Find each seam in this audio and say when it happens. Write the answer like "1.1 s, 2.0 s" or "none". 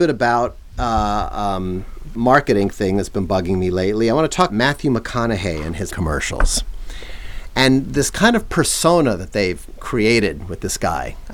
2.1 s, 4.5 s, 5.9 s